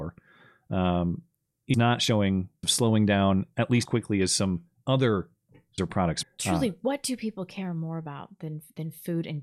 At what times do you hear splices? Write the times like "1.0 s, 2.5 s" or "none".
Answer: 1.7 s, 2.6 s, 3.9 s, 5.8 s, 6.2 s